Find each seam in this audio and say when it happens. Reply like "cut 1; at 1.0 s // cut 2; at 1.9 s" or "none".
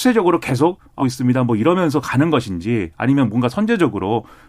cut 1; at 1.0 s